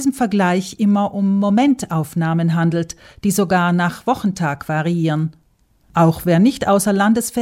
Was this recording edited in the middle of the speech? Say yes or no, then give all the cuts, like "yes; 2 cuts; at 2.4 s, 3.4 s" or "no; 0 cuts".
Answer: no; 0 cuts